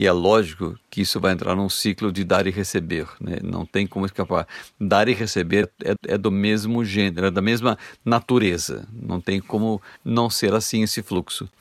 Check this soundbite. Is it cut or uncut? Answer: cut